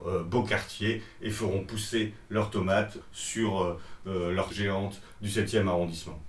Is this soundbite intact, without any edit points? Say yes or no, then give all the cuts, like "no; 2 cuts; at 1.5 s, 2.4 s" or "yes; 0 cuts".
no; 2 cuts; at 3.0 s, 4.5 s